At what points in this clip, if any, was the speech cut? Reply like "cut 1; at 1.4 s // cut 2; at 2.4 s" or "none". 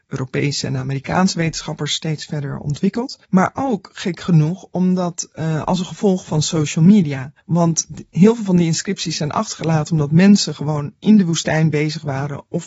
cut 1; at 3.2 s // cut 2; at 7.4 s